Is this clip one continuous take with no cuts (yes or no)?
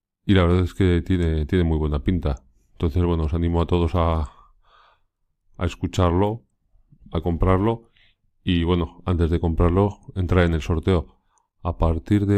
yes